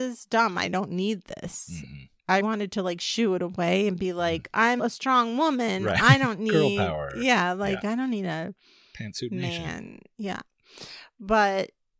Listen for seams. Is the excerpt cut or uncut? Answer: cut